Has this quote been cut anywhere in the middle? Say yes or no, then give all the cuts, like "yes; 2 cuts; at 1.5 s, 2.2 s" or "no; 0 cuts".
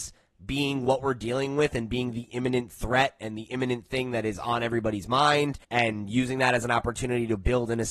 yes; 1 cut; at 5.6 s